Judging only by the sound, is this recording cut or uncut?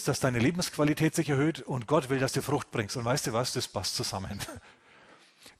uncut